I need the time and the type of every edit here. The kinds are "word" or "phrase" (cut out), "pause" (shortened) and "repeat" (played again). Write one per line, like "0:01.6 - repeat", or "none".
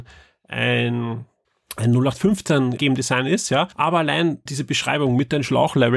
0:01.4 - pause
0:02.8 - word
0:03.7 - pause
0:04.5 - word